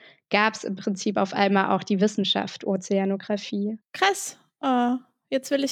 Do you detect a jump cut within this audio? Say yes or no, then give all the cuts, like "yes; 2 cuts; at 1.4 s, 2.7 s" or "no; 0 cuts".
no; 0 cuts